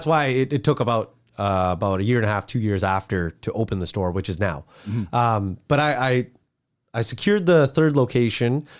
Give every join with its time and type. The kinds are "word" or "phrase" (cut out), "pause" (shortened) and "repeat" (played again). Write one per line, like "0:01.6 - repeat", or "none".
none